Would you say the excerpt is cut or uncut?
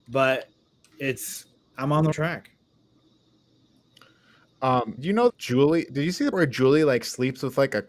cut